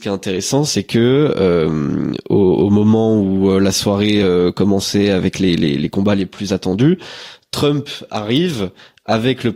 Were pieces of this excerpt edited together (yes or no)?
no